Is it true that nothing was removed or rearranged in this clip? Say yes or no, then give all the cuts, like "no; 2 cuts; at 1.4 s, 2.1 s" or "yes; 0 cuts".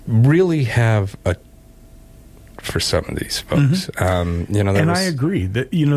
no; 1 cut; at 2.6 s